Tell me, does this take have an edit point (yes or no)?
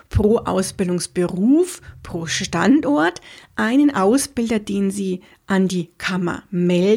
no